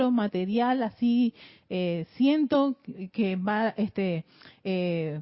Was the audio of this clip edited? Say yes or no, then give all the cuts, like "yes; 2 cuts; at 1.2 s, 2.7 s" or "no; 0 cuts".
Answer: no; 0 cuts